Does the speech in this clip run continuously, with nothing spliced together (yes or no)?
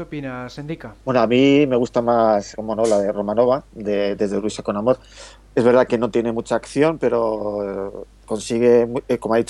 no